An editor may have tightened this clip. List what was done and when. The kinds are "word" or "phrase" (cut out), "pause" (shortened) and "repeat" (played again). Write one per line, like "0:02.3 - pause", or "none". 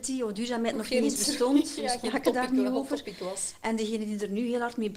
none